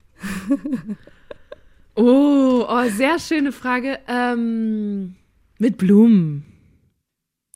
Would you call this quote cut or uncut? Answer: uncut